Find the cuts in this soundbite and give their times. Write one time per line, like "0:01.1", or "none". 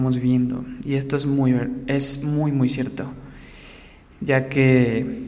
none